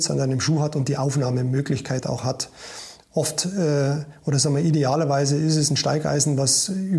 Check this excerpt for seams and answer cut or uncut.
uncut